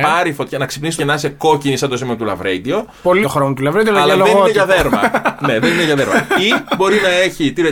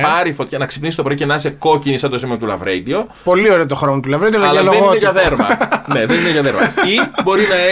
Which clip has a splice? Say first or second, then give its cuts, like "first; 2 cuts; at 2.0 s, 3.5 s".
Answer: first; 2 cuts; at 1.0 s, 3.2 s